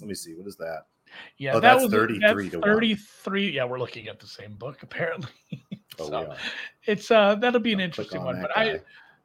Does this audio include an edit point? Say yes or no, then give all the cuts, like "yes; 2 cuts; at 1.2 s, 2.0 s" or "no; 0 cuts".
no; 0 cuts